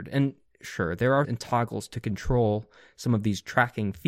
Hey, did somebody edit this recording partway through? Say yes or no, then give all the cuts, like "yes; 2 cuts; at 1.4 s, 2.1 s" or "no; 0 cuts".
yes; 1 cut; at 1.2 s